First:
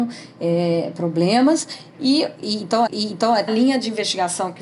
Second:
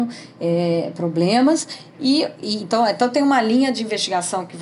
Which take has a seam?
first; 2 cuts; at 2.9 s, 3.5 s

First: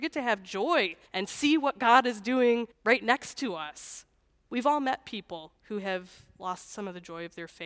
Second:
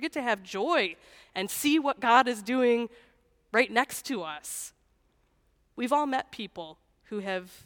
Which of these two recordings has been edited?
first; 4 cuts; at 1.1 s, 2.7 s, 4.2 s, 5.6 s

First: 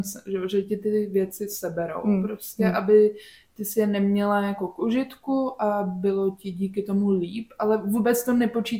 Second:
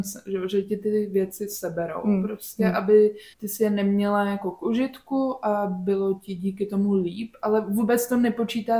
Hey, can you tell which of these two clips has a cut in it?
second; 1 cut; at 3.3 s

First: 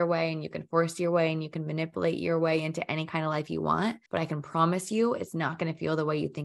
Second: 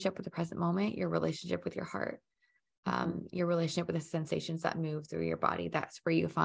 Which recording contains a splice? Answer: first; 1 cut; at 4.1 s

